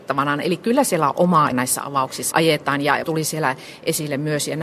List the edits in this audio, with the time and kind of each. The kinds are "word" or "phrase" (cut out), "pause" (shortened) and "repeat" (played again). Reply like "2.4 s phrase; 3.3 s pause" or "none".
1.5 s word; 2.3 s word; 3.0 s word